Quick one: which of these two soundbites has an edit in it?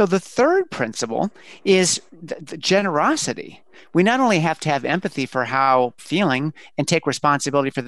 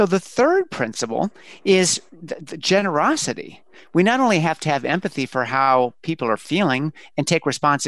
first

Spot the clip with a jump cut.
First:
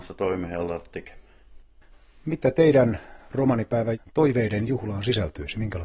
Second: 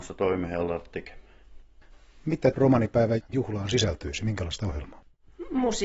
second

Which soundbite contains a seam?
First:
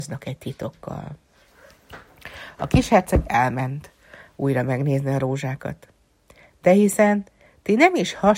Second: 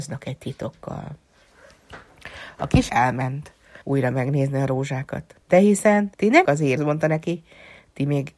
second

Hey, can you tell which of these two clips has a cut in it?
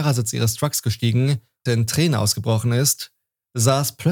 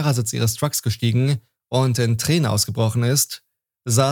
first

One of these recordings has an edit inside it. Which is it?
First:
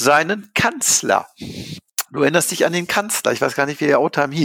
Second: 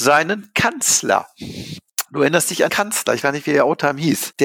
second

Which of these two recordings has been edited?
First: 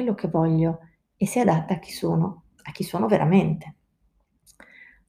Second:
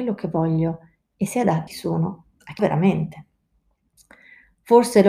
second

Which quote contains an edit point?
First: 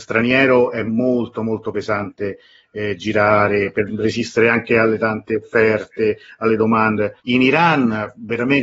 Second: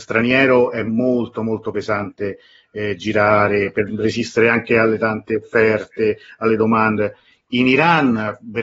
first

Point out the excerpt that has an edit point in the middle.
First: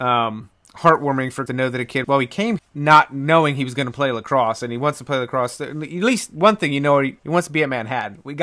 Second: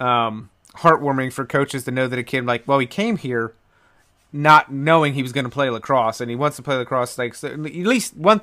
first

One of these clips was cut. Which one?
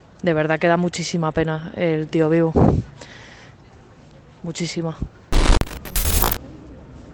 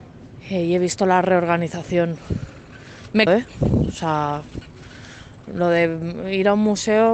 second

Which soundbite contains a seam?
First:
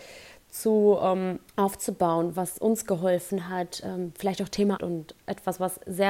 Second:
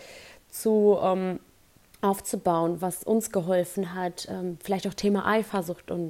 first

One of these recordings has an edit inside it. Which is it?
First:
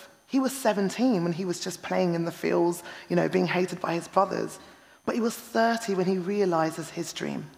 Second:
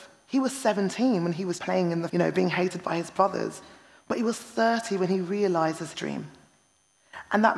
second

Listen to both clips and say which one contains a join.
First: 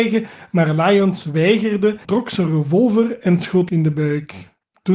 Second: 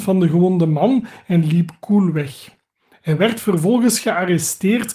first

